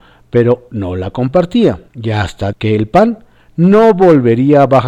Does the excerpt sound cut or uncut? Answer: cut